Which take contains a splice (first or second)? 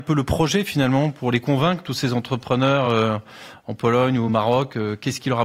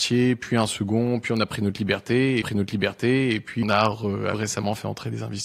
second